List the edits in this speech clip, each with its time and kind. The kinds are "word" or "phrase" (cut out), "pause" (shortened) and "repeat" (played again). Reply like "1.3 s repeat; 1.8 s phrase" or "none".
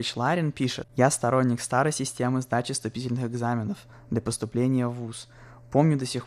none